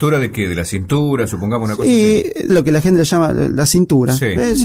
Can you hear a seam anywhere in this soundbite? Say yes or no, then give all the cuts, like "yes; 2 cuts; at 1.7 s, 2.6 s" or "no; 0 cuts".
yes; 1 cut; at 2.5 s